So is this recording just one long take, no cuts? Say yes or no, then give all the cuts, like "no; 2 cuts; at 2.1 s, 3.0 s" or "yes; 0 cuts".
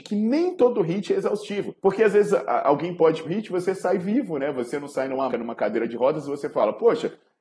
no; 3 cuts; at 1.8 s, 3.2 s, 5.3 s